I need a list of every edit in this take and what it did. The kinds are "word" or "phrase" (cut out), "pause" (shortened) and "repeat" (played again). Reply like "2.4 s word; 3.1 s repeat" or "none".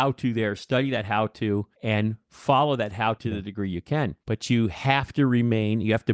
1.7 s pause; 3.2 s word; 4.2 s pause

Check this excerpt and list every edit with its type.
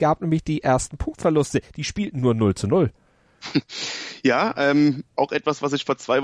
5.1 s pause

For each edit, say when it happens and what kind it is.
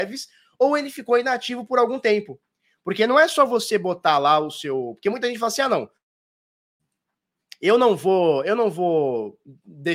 none

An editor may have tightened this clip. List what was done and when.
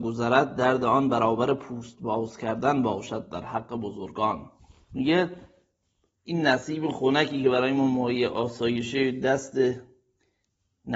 4.6 s pause

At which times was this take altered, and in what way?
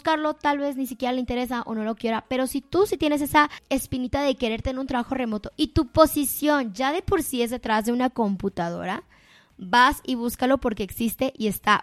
none

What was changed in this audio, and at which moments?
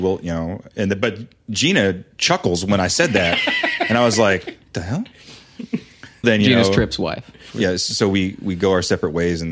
4.6 s pause; 6.2 s word

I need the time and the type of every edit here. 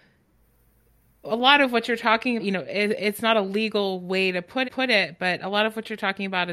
2.4 s word; 4.6 s repeat

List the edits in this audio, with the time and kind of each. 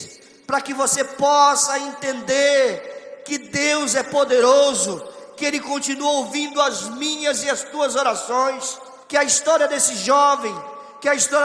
9.0 s pause

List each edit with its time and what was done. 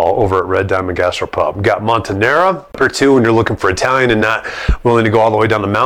none

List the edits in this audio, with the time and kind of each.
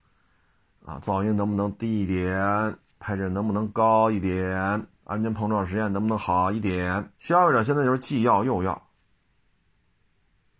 7.1 s pause

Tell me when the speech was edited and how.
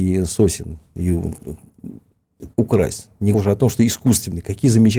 2.5 s pause; 3.3 s word

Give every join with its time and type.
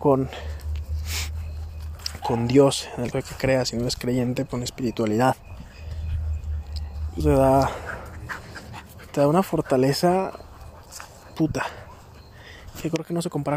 3.1 s word; 4.5 s word; 7.2 s word

